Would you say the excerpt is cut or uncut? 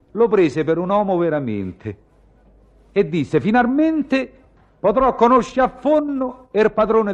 uncut